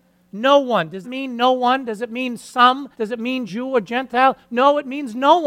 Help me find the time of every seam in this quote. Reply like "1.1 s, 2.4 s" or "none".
1.0 s, 2.9 s, 3.5 s